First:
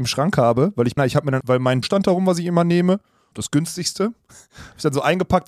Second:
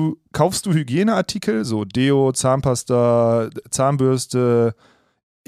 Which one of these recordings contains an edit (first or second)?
first